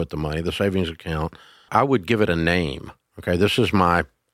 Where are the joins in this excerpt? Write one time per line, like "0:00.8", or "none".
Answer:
0:01.7